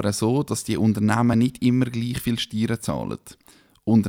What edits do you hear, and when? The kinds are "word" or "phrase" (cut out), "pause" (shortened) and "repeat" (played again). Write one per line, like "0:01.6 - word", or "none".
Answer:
none